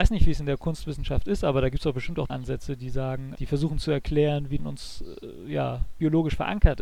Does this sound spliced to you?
yes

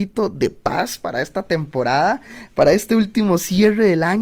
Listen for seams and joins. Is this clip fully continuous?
yes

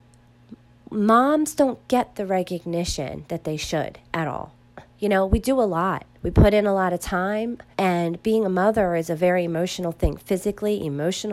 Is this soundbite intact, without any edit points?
no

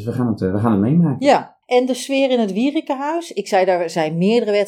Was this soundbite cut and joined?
yes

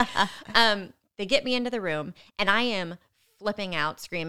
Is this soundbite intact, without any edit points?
yes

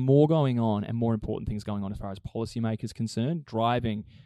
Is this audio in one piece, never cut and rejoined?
yes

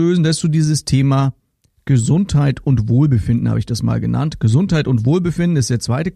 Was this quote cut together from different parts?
no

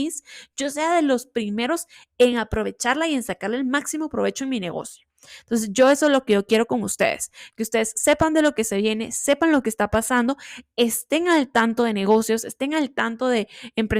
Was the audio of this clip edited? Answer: no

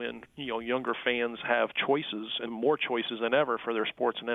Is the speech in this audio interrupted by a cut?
yes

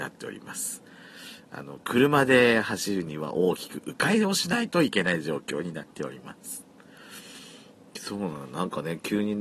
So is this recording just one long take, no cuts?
yes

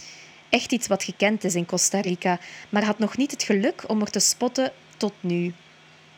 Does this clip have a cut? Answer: no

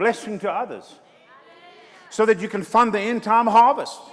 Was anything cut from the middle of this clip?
no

